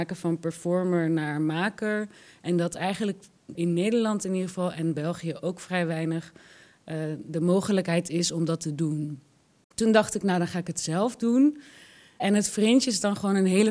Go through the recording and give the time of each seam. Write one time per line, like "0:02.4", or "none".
0:03.6

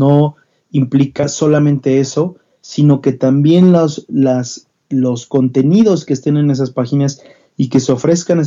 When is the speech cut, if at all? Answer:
none

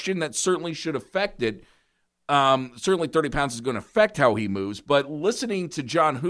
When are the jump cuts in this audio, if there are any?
none

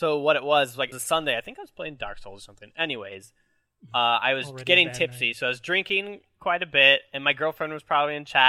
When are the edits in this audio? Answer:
0:00.9

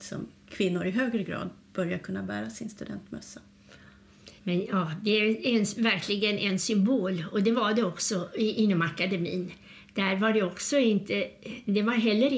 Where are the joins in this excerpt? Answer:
0:04.4

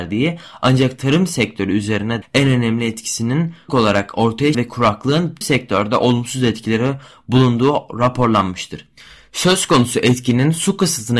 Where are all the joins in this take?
0:02.2
0:03.7
0:04.5
0:05.4

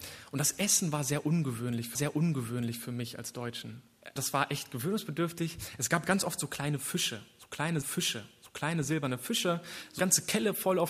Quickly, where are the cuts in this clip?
0:01.9
0:04.2
0:07.8
0:10.0

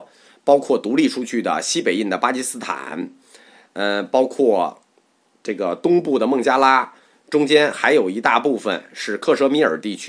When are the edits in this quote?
none

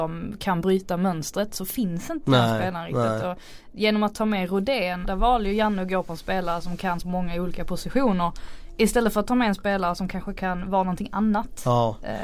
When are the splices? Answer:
0:05.0
0:07.0

